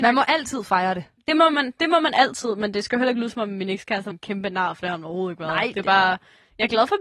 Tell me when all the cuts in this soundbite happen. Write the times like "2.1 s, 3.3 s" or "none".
4.1 s